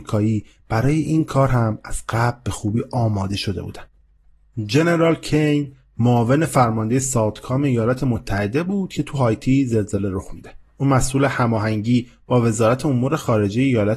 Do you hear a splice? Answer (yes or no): yes